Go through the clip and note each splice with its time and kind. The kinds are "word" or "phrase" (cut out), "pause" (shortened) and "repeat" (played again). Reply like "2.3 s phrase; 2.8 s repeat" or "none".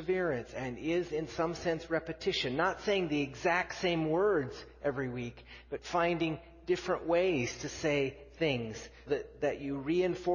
9.1 s word